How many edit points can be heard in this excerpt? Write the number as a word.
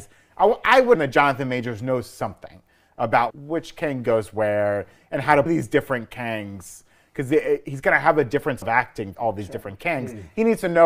five